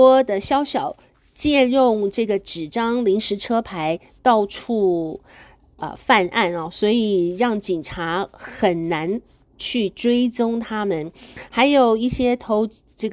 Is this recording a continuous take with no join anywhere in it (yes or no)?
yes